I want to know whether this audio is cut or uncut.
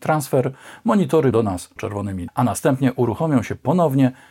cut